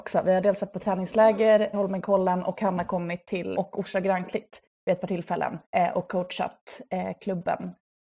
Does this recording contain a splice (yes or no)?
yes